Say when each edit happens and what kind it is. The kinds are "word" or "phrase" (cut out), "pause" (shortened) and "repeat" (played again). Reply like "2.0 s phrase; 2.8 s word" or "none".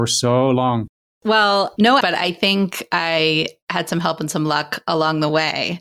0.9 s pause; 2.0 s word